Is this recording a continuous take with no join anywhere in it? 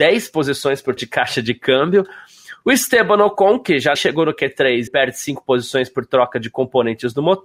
no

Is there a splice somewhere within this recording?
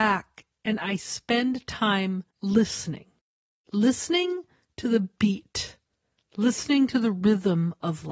no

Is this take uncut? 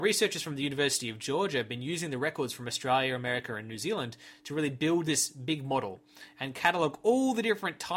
yes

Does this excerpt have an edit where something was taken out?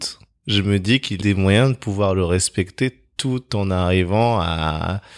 yes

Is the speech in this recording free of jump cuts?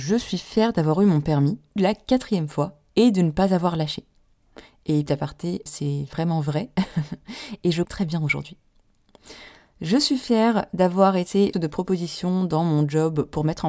no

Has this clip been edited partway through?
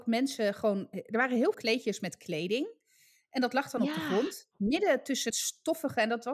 yes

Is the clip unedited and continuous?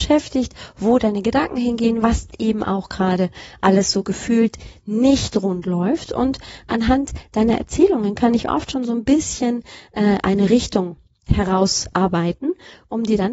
yes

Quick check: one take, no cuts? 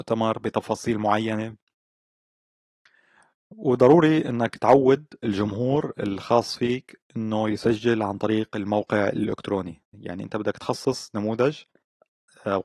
yes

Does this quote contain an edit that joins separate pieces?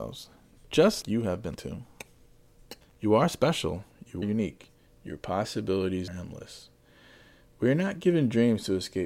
yes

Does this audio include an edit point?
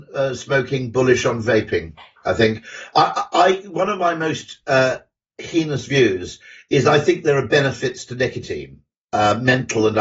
no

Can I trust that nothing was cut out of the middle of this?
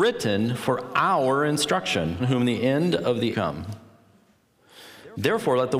no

